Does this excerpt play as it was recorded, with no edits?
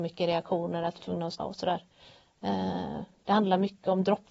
no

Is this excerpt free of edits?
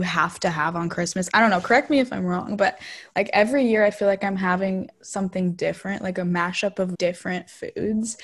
no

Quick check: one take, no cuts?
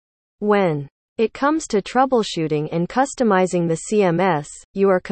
yes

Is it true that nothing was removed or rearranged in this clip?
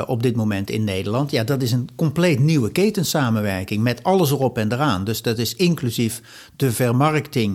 yes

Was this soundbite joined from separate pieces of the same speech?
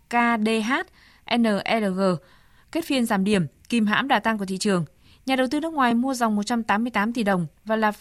no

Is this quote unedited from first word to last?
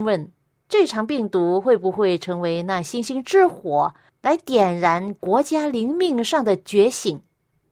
yes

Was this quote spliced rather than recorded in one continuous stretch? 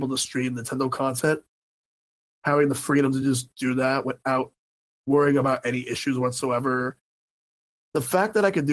no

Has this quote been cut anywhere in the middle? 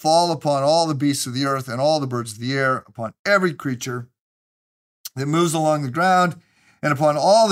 no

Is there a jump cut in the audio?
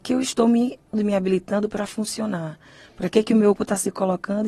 yes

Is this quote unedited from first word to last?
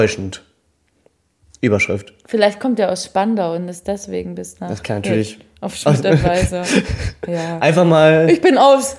yes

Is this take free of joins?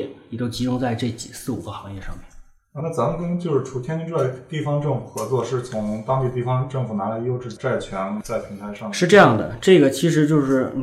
no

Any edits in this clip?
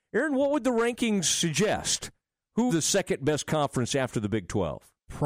yes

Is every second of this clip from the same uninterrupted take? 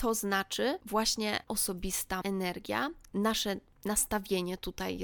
no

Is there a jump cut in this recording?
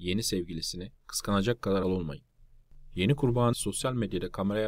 yes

